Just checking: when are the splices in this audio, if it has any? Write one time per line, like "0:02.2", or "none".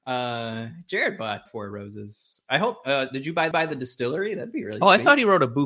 0:01.5
0:03.5